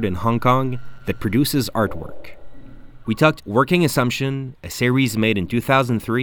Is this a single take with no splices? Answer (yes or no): no